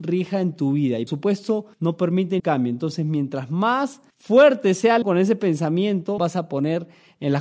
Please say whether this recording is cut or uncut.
cut